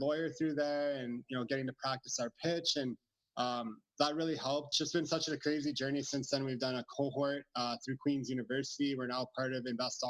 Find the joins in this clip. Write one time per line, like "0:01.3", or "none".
0:04.7

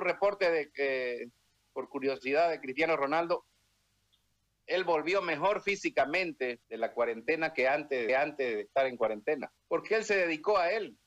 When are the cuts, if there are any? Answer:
0:06.6
0:08.1
0:09.6

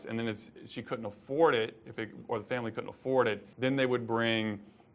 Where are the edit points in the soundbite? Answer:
0:03.5

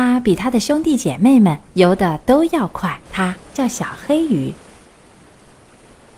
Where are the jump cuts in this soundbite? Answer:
0:01.7
0:03.0

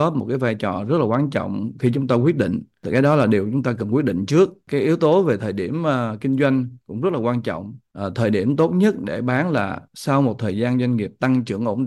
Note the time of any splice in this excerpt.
0:09.9

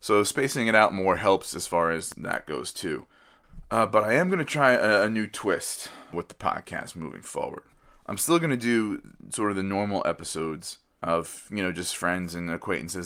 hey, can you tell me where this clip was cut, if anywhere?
0:07.7

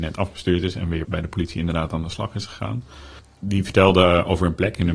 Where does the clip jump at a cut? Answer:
0:01.0

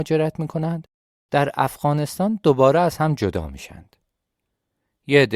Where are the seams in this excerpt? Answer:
none

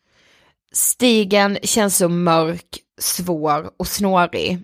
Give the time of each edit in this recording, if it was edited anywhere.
0:02.9

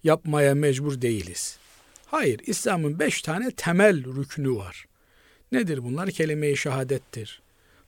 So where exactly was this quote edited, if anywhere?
none

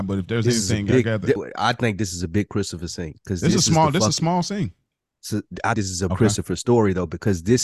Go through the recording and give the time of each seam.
0:01.4
0:05.7
0:06.1

